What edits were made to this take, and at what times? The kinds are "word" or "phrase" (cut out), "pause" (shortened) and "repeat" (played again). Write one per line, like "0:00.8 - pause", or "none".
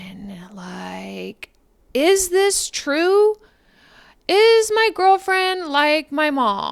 none